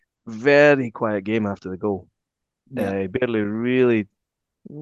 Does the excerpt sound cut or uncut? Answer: uncut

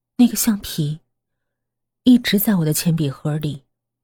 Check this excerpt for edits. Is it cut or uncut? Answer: uncut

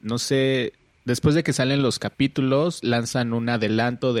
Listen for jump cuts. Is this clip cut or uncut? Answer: uncut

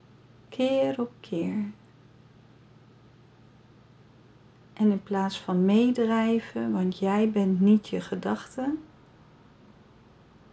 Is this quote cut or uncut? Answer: uncut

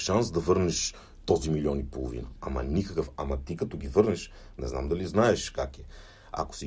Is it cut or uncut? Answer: uncut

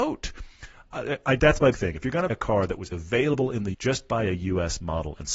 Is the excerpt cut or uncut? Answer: cut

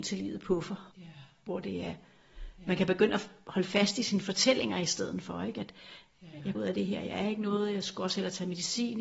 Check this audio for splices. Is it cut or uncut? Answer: cut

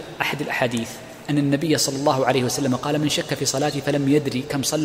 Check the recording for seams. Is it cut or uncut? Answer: uncut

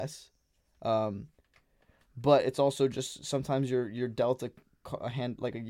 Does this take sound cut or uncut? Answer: uncut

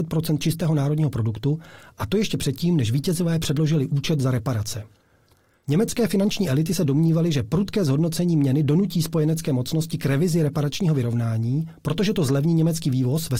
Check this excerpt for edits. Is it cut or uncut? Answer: uncut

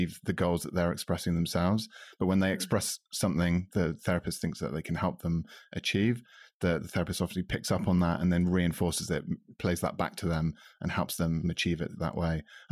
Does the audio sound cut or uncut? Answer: uncut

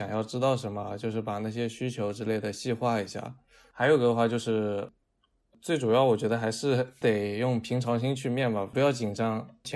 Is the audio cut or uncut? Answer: uncut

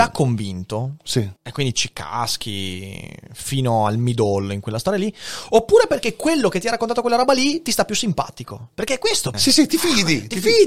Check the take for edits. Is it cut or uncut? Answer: cut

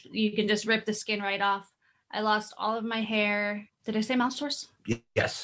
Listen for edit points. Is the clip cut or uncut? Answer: uncut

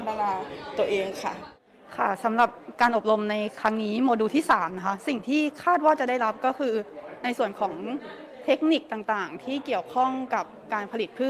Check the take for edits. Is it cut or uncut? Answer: cut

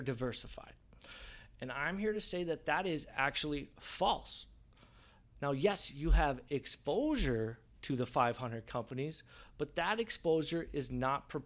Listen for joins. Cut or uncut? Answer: uncut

